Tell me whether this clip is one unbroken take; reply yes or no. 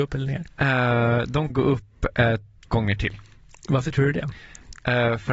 no